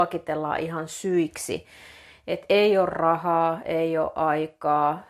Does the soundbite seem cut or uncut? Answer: uncut